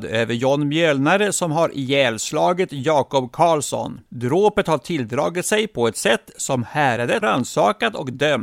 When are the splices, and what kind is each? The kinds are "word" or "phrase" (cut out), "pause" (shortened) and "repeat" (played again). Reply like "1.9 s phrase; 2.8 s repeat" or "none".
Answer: 4.1 s pause; 7.2 s word